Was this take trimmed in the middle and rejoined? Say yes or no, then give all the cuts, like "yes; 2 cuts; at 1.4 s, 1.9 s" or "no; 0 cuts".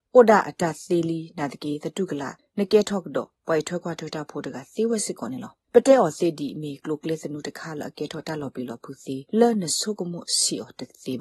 yes; 1 cut; at 9.3 s